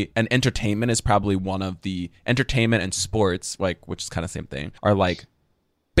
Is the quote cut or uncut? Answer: cut